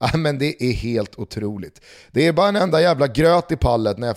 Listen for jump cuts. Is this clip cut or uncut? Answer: uncut